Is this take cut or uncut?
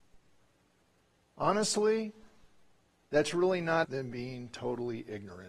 cut